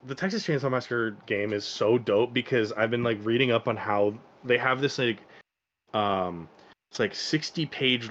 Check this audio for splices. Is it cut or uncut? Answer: uncut